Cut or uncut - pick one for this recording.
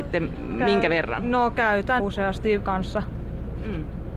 cut